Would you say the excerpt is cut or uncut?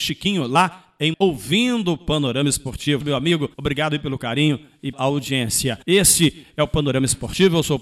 cut